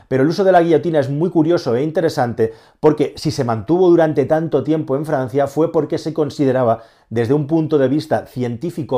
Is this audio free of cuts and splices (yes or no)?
yes